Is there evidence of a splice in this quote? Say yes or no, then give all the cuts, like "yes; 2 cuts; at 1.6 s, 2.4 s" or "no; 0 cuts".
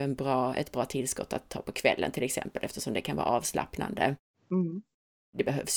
no; 0 cuts